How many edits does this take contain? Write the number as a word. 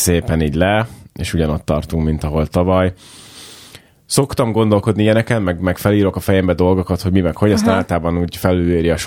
zero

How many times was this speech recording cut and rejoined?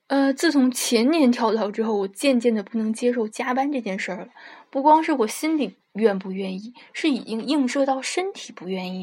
one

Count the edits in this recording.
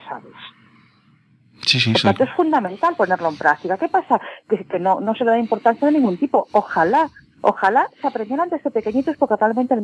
zero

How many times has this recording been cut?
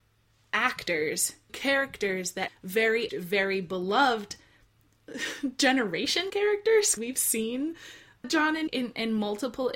seven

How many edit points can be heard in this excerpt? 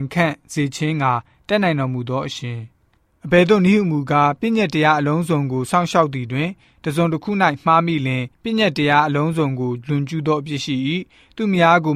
two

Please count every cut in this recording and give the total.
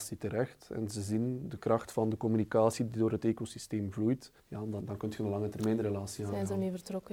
two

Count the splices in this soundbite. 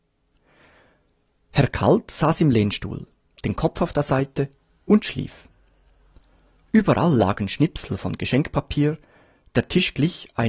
zero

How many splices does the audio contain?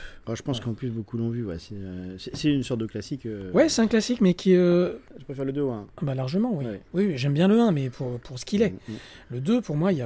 zero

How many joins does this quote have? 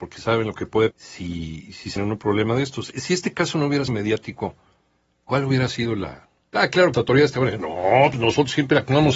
four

